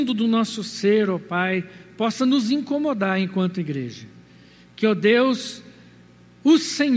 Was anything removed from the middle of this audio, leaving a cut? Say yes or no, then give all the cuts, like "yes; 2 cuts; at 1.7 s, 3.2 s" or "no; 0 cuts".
no; 0 cuts